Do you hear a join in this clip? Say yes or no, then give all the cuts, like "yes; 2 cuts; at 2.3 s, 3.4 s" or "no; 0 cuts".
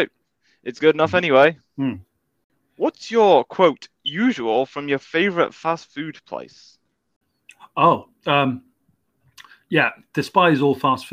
yes; 1 cut; at 1.7 s